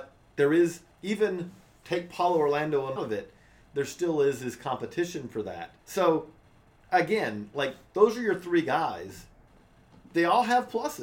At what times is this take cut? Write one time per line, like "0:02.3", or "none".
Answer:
0:00.9
0:03.0
0:05.8